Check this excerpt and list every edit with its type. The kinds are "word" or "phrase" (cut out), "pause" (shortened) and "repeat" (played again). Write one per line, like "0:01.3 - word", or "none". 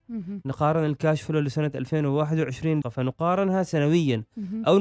0:02.8 - phrase